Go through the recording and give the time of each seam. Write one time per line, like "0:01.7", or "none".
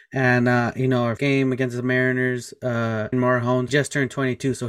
0:01.2
0:03.1
0:03.7